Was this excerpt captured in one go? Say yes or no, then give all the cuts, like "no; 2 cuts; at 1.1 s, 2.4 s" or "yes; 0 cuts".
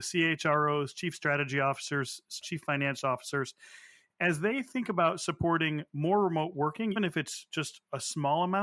no; 2 cuts; at 2.4 s, 7.0 s